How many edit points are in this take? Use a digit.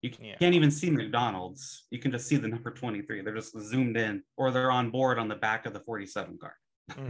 1